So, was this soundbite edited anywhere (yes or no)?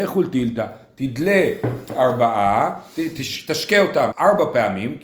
yes